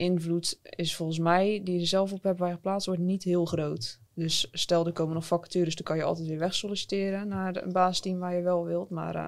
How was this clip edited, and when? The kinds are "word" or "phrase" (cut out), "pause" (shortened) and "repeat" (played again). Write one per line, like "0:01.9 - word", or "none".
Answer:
0:04.1 - pause

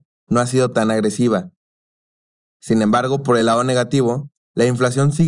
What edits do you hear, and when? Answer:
none

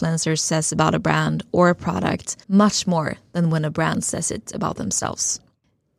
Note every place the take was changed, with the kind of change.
0:02.4 - pause

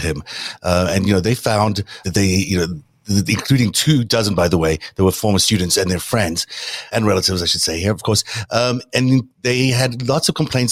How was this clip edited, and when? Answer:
0:02.0 - word
0:06.9 - word

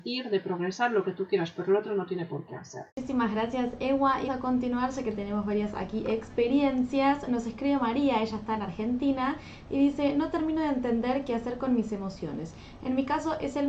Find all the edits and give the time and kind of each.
0:02.9 - pause
0:04.3 - word

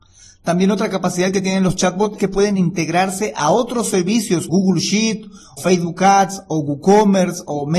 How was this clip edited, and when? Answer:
0:02.2 - word
0:04.5 - word
0:05.6 - word

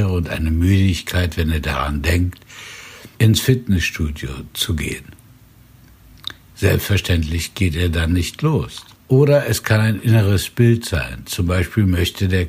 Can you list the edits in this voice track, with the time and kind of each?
0:03.1 - pause
0:08.9 - pause

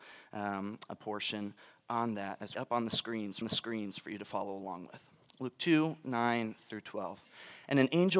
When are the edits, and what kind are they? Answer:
0:01.0 - word
0:02.5 - phrase
0:03.4 - repeat

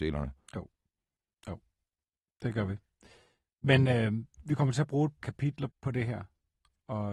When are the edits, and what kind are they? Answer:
0:04.3 - pause
0:05.2 - word
0:05.7 - word

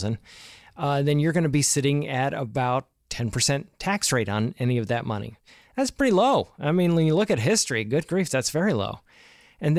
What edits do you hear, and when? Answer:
none

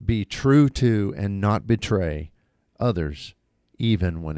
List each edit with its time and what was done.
none

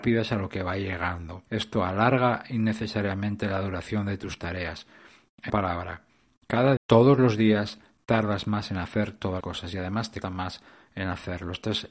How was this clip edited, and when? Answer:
0:01.5 - pause
0:05.5 - word
0:06.8 - word
0:09.4 - word
0:10.2 - word

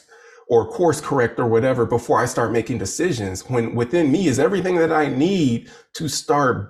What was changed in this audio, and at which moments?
none

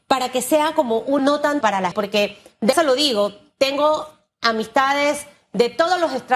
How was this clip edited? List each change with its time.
0:01.2 - word
0:01.6 - word
0:01.9 - word
0:02.7 - word

